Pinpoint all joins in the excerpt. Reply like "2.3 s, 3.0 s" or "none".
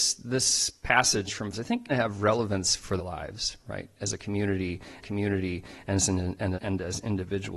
1.5 s, 1.9 s, 3.0 s, 5.0 s, 6.5 s

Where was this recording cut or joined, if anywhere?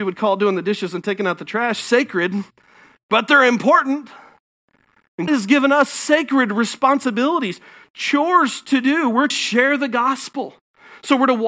5.3 s, 9.3 s

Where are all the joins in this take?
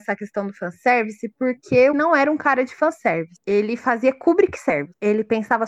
1.9 s

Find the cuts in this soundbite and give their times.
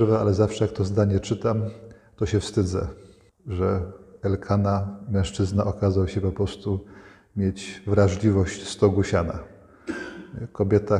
none

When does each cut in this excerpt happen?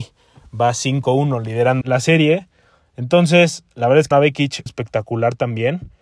1.8 s, 4.1 s, 4.7 s

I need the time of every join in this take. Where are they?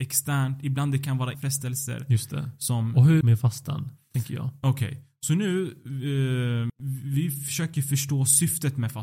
1.3 s, 3.2 s, 6.7 s

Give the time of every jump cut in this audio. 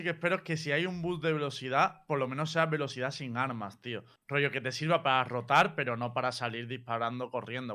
none

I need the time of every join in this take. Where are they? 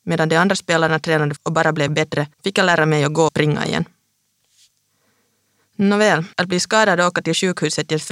1.4 s, 1.9 s, 2.3 s, 3.3 s, 6.3 s

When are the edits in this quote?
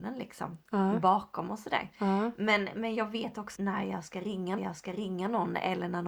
3.5 s, 4.6 s

